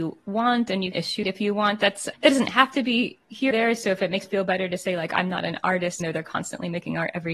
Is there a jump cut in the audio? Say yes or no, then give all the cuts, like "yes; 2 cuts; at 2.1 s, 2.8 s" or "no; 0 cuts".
yes; 6 cuts; at 0.9 s, 1.2 s, 2.1 s, 3.5 s, 4.3 s, 6.0 s